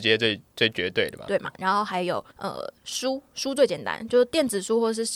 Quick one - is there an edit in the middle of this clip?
yes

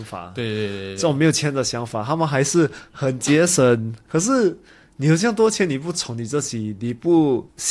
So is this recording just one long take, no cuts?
yes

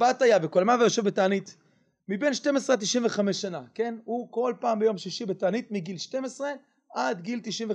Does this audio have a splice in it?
no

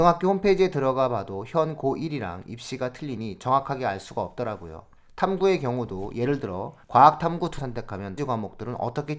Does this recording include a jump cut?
yes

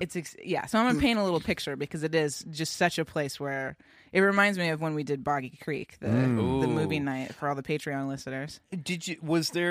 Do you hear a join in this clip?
no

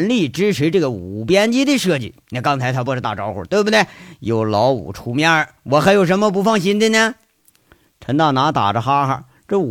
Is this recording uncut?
yes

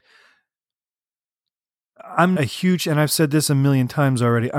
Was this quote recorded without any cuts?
no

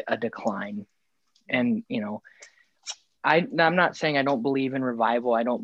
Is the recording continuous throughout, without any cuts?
yes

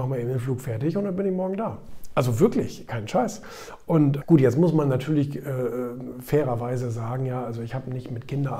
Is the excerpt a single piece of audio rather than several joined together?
no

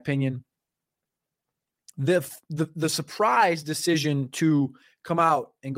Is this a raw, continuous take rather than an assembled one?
yes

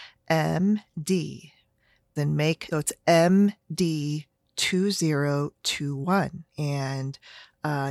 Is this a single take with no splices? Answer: no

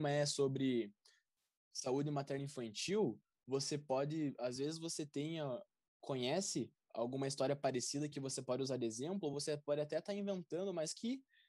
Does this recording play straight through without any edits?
yes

